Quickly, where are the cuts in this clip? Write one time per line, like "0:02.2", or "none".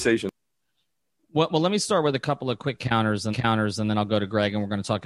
0:03.3